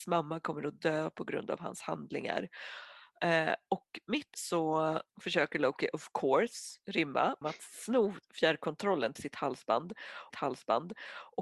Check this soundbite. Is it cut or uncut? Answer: cut